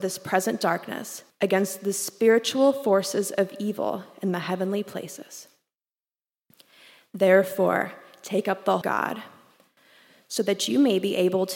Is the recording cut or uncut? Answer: cut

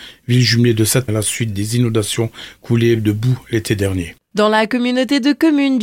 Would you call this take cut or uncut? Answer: cut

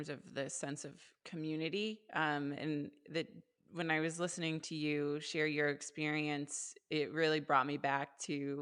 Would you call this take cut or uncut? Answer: uncut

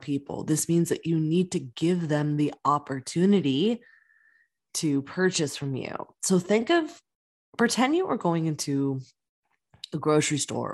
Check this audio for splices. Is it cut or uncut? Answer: uncut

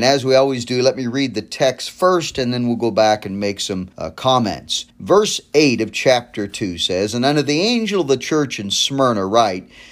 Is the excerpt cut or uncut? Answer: cut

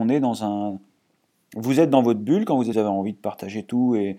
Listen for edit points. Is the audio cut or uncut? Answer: cut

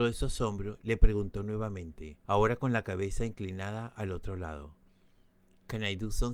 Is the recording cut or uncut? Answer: cut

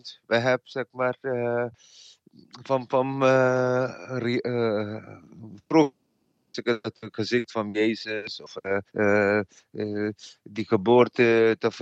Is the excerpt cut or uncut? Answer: cut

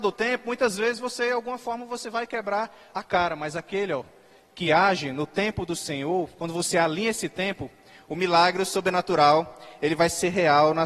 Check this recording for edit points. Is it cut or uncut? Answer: uncut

